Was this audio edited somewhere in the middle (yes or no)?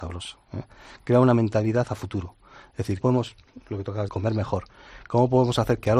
yes